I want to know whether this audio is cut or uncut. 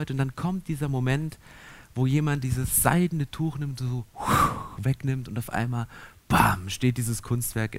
uncut